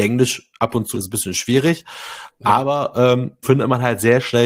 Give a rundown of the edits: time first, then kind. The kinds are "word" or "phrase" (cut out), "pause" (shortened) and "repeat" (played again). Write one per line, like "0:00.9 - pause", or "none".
0:00.9 - word
0:03.4 - word